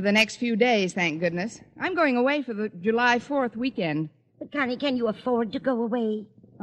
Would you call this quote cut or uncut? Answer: uncut